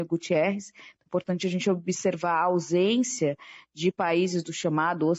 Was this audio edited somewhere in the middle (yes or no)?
no